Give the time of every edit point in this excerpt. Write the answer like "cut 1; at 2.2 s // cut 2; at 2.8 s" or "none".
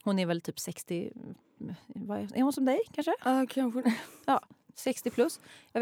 none